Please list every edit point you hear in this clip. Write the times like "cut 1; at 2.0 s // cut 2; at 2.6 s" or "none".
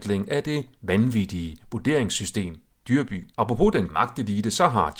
cut 1; at 2.7 s // cut 2; at 3.3 s // cut 3; at 3.9 s